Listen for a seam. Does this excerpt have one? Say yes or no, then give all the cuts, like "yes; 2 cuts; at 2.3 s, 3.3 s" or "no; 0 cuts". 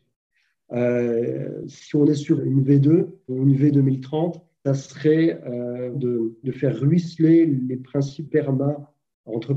yes; 6 cuts; at 1.7 s, 2.4 s, 3.3 s, 4.6 s, 5.9 s, 8.2 s